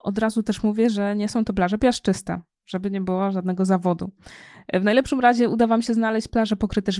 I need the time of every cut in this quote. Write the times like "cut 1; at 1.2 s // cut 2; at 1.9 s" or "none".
none